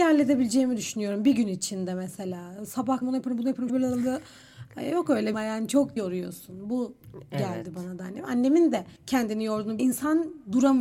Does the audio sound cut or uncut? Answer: cut